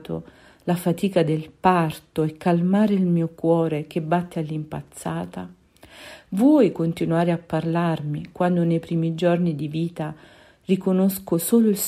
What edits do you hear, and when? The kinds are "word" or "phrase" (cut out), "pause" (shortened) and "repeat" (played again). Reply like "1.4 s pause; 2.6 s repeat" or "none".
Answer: none